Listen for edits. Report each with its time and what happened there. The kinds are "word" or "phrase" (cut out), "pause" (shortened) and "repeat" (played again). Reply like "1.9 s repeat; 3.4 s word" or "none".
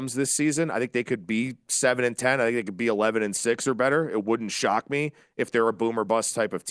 none